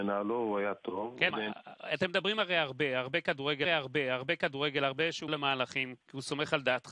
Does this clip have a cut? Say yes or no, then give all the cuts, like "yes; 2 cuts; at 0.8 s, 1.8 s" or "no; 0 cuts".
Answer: yes; 4 cuts; at 1.3 s, 3.6 s, 5.3 s, 6.0 s